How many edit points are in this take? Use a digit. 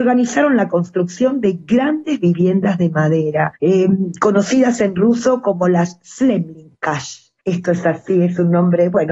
2